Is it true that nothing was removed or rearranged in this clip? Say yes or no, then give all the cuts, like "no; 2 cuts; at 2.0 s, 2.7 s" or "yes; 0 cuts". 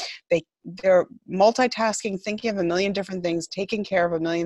yes; 0 cuts